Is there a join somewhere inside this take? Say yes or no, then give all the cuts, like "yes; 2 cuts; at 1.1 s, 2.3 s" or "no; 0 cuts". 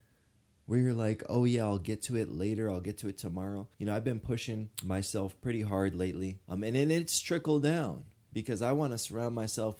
yes; 3 cuts; at 3.7 s, 4.7 s, 6.4 s